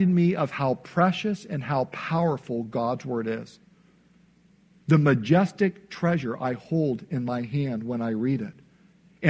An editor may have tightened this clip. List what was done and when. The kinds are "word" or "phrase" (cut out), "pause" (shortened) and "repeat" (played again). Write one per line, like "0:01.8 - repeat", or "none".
none